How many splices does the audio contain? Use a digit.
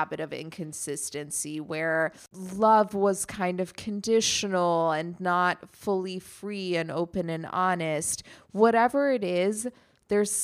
0